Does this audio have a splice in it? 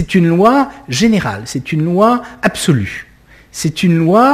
no; 0 cuts

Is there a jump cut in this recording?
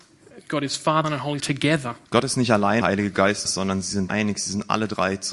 yes; 6 cuts; at 1.0 s, 1.4 s, 2.1 s, 2.8 s, 3.4 s, 4.1 s

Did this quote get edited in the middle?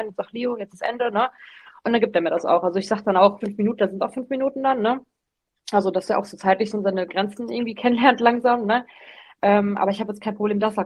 yes; 2 cuts; at 3.4 s, 6.7 s

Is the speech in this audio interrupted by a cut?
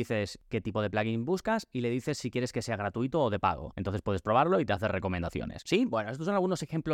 no; 0 cuts

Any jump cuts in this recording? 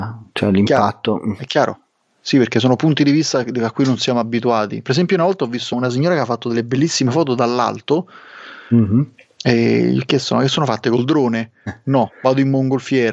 yes; 1 cut; at 5.7 s

